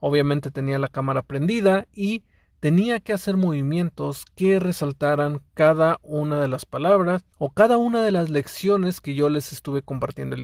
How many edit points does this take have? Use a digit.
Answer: 1